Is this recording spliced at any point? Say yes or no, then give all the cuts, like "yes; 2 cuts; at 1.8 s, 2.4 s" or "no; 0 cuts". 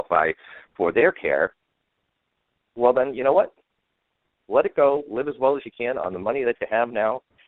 no; 0 cuts